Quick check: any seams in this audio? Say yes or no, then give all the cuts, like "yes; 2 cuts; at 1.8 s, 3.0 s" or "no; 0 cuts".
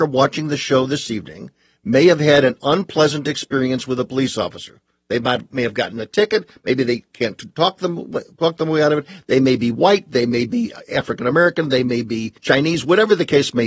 yes; 1 cut; at 12.4 s